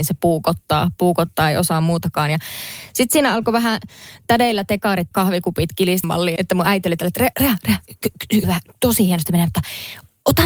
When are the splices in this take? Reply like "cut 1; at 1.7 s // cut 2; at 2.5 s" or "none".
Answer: cut 1; at 5.1 s // cut 2; at 6.0 s // cut 3; at 6.4 s // cut 4; at 7.3 s // cut 5; at 8.4 s